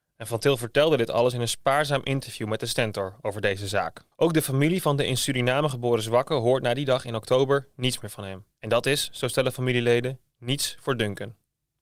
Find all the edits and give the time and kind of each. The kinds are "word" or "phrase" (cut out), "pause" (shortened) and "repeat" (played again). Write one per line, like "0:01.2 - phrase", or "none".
0:04.1 - pause
0:08.5 - pause